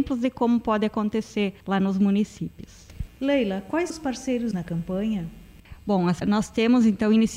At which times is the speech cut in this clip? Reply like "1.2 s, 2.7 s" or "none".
1.6 s, 3.9 s, 4.5 s, 6.2 s